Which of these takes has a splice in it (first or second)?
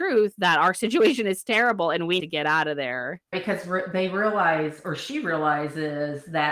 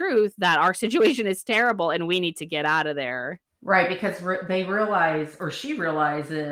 first